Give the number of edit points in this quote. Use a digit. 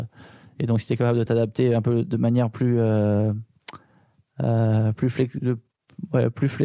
0